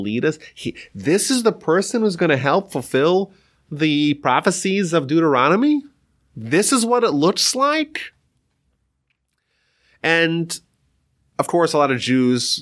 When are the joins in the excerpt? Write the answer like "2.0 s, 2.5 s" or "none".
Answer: none